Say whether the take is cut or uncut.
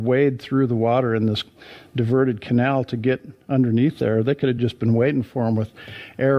uncut